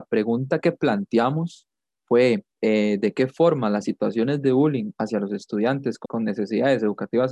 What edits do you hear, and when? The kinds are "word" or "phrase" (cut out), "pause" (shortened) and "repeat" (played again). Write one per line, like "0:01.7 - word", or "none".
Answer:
0:02.5 - pause
0:06.0 - word